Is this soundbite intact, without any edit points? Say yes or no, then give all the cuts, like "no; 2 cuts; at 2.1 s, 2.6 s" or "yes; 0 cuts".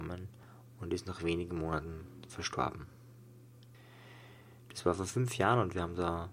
yes; 0 cuts